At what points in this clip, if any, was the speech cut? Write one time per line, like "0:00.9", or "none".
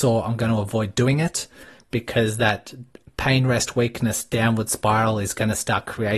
none